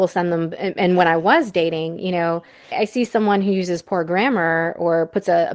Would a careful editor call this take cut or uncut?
cut